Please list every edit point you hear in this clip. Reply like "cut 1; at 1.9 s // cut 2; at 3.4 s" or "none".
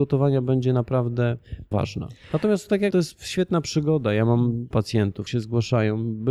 cut 1; at 1.7 s // cut 2; at 2.9 s // cut 3; at 4.7 s // cut 4; at 5.3 s

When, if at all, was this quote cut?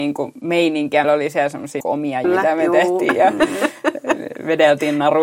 cut 1; at 1.0 s // cut 2; at 1.8 s // cut 3; at 2.2 s

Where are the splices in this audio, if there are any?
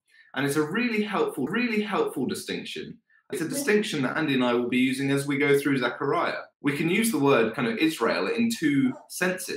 cut 1; at 1.5 s // cut 2; at 3.3 s // cut 3; at 6.5 s

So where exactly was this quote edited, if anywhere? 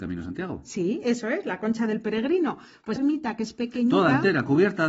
cut 1; at 3.0 s

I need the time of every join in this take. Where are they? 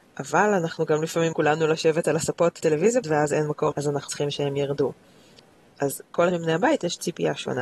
cut 1; at 1.3 s // cut 2; at 2.6 s // cut 3; at 3.0 s // cut 4; at 3.7 s // cut 5; at 4.1 s // cut 6; at 6.3 s

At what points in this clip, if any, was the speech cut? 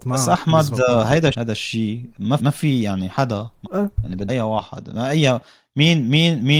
cut 1; at 1.3 s // cut 2; at 2.4 s // cut 3; at 3.6 s // cut 4; at 4.3 s

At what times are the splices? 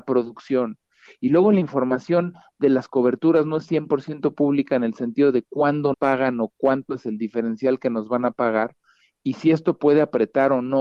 cut 1; at 5.9 s

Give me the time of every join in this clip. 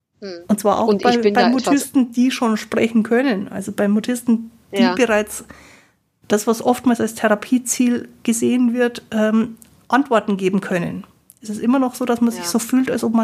none

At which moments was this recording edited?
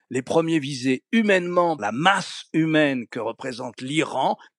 cut 1; at 1.8 s

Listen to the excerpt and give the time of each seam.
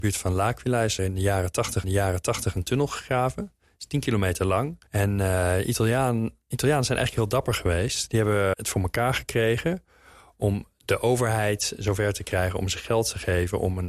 cut 1; at 1.0 s // cut 2; at 1.8 s // cut 3; at 4.9 s // cut 4; at 8.5 s

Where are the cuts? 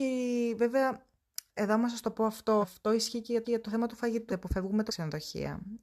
cut 1; at 1.5 s // cut 2; at 2.6 s // cut 3; at 3.4 s // cut 4; at 4.3 s // cut 5; at 4.9 s

